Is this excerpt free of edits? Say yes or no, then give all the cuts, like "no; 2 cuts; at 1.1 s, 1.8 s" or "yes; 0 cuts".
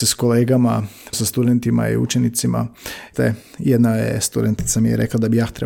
no; 2 cuts; at 1.1 s, 3.1 s